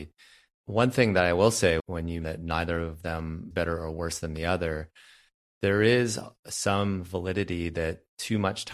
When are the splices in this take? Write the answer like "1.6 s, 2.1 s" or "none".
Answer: 1.8 s, 2.2 s, 3.5 s